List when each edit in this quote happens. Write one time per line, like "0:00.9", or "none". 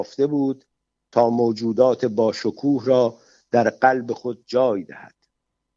none